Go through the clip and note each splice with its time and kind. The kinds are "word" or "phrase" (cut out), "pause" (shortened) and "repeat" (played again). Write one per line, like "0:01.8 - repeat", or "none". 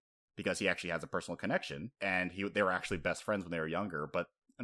0:02.0 - pause